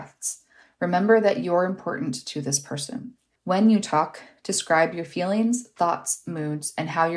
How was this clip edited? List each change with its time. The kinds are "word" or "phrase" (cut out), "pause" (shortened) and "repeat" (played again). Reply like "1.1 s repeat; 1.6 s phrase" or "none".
3.4 s pause